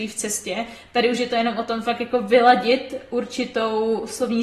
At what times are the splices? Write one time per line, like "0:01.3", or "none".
none

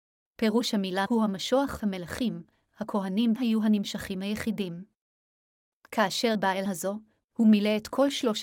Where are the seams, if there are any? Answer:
0:01.1
0:01.8
0:03.4
0:06.3
0:06.7

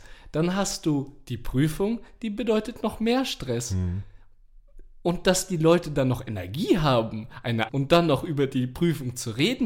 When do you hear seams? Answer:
0:07.7

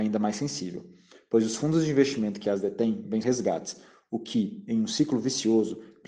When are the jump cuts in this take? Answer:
0:03.2

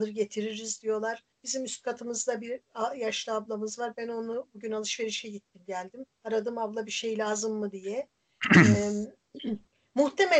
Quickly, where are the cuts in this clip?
0:01.3
0:06.1

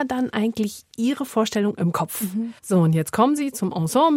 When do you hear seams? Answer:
0:02.6

